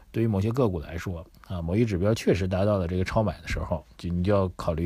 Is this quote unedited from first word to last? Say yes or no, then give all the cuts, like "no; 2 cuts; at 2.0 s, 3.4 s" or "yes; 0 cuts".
no; 1 cut; at 3.9 s